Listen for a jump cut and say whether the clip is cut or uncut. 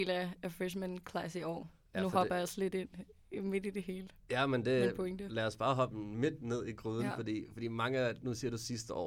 uncut